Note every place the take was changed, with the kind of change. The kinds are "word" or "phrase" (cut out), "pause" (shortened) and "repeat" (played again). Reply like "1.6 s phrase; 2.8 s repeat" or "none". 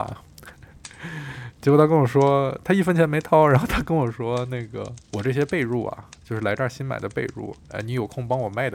5.0 s pause; 7.6 s pause